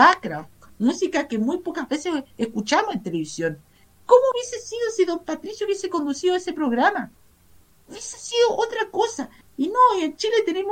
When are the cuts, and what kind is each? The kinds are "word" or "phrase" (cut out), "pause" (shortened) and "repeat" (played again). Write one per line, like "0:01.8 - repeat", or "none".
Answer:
none